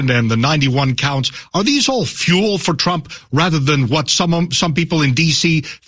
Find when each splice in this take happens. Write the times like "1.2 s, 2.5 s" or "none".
none